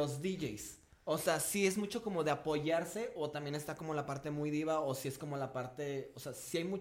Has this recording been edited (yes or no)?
no